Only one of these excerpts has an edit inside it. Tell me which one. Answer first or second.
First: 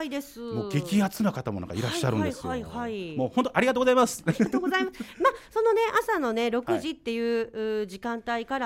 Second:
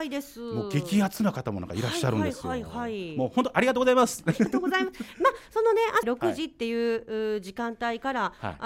second